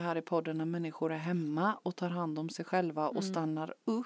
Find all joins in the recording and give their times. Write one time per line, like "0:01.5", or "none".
0:01.8